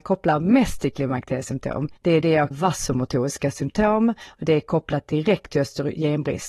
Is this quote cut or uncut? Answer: cut